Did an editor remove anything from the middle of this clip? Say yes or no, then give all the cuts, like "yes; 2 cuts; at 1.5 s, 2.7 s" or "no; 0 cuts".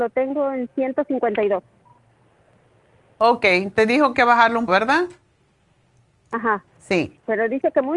yes; 3 cuts; at 4.1 s, 4.7 s, 6.7 s